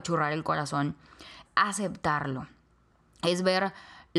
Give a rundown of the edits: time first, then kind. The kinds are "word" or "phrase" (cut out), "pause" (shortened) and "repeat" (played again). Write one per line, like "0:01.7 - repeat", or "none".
0:01.4 - word